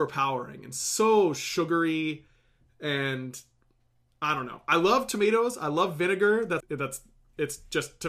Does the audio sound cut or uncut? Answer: cut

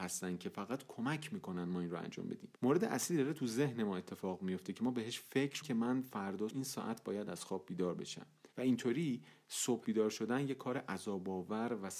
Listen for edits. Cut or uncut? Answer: cut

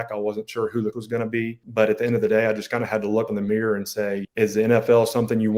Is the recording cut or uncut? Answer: cut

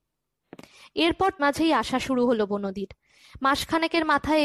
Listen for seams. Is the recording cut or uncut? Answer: cut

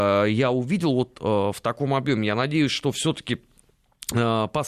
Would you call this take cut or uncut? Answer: uncut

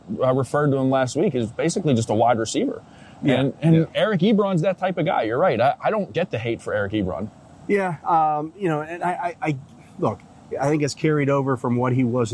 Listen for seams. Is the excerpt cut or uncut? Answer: uncut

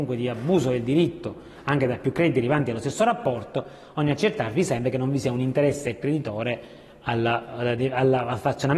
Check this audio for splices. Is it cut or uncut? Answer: uncut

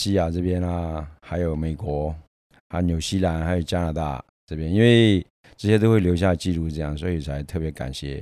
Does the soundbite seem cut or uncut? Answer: cut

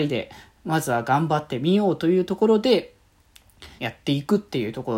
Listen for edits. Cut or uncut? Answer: cut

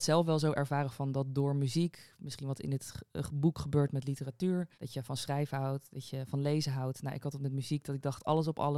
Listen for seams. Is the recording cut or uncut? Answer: cut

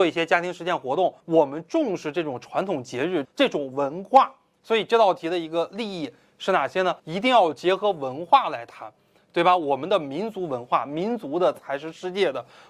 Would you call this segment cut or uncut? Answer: cut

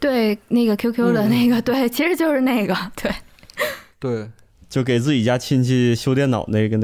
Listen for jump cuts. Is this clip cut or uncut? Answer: uncut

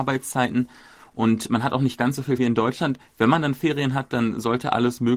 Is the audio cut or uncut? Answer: cut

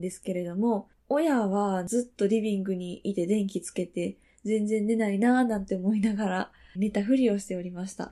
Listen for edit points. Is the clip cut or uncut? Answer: cut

